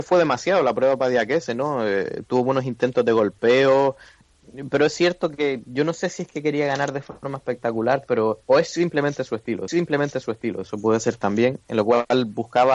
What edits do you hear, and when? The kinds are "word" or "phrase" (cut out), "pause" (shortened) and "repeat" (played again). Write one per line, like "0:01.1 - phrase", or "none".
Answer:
0:08.4 - pause
0:09.7 - repeat

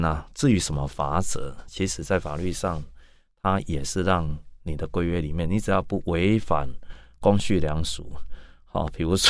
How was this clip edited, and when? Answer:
none

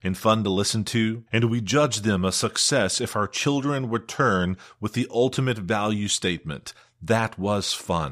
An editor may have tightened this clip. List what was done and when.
0:01.3 - pause

